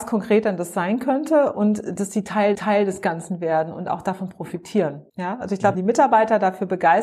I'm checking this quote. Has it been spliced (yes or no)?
yes